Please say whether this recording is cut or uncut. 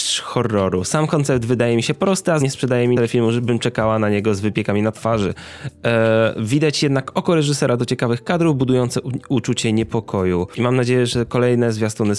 cut